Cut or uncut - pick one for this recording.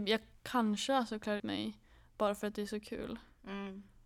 cut